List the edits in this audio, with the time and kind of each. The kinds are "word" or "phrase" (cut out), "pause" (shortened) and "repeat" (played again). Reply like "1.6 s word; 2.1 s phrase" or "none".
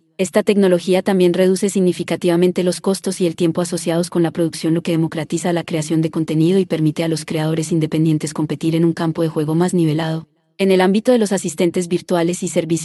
none